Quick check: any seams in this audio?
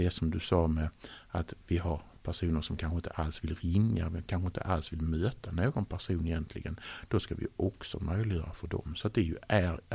no; 0 cuts

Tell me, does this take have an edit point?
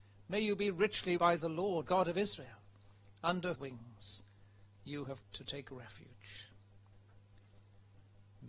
yes; 4 cuts; at 1.2 s, 1.8 s, 3.5 s, 5.2 s

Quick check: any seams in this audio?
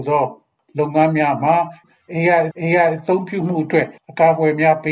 yes; 2 cuts; at 2.5 s, 4.0 s

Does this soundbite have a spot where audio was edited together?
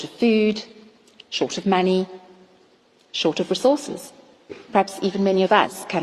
no; 0 cuts

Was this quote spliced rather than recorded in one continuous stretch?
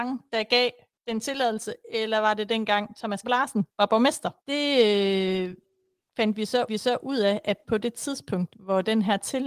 yes; 3 cuts; at 3.2 s, 4.4 s, 6.7 s

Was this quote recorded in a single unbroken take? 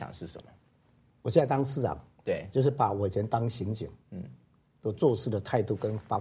yes; 0 cuts

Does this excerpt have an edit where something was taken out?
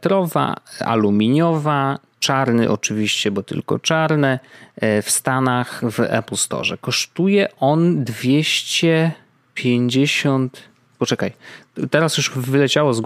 no; 0 cuts

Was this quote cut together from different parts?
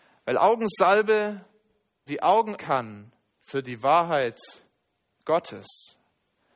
yes; 2 cuts; at 2.1 s, 2.6 s

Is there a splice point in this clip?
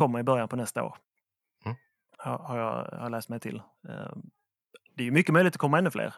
no; 0 cuts

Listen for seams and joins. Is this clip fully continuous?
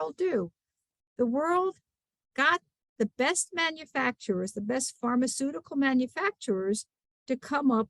yes; 0 cuts

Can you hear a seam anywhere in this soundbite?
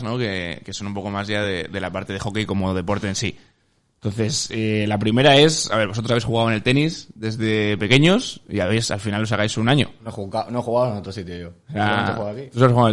no; 0 cuts

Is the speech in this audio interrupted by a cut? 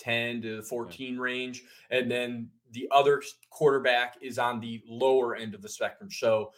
no; 0 cuts

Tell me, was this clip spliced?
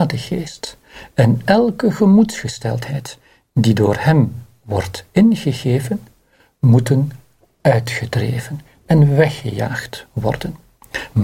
no; 0 cuts

